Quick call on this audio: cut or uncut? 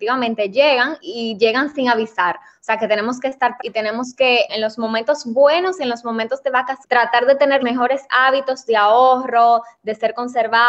cut